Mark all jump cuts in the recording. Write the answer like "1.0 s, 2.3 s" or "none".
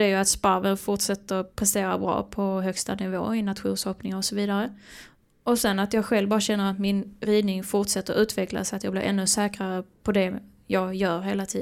none